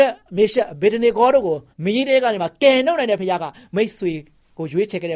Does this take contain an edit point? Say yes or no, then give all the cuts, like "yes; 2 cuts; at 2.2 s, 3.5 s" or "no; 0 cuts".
yes; 1 cut; at 1.7 s